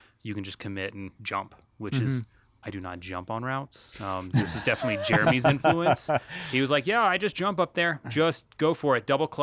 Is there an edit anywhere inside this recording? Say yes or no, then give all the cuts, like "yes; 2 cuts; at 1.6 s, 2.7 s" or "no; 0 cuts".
yes; 1 cut; at 1.2 s